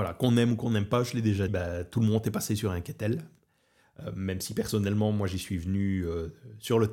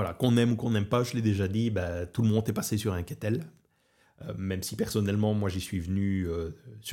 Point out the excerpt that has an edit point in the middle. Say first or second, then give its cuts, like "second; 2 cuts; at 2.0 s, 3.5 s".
first; 1 cut; at 1.5 s